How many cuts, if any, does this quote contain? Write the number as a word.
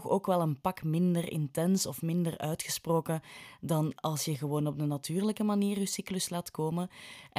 zero